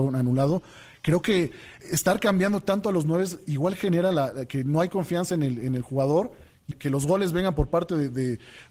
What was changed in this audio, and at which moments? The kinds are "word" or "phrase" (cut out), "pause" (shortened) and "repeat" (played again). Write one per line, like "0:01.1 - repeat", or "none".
0:01.8 - word
0:06.7 - phrase